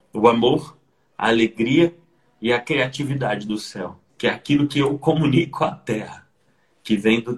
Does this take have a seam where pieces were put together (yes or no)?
yes